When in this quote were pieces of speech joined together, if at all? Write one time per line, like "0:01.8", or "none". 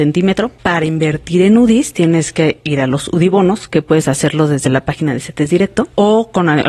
none